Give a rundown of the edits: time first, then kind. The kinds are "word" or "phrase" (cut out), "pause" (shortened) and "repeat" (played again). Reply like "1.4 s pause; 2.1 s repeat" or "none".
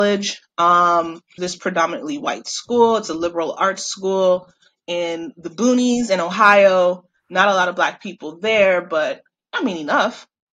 1.4 s phrase